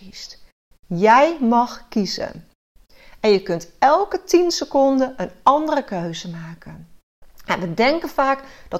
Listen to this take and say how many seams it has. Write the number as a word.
zero